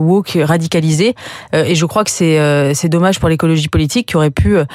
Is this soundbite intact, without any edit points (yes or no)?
yes